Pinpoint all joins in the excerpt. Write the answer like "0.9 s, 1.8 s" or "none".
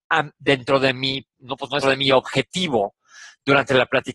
1.8 s